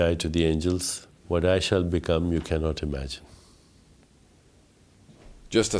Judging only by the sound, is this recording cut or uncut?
cut